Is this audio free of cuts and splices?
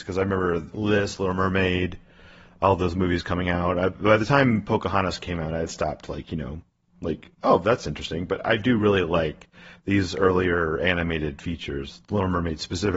yes; 0 cuts

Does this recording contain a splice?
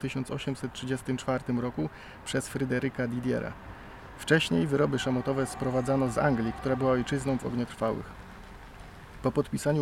yes; 1 cut; at 7.4 s

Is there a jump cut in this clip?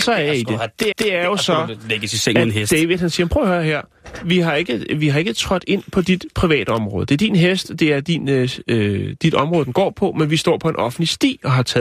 yes; 1 cut; at 0.9 s

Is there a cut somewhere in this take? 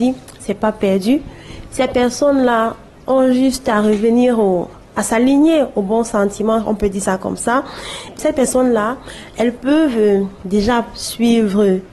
no; 0 cuts

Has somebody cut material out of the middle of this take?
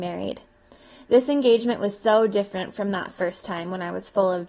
no; 0 cuts

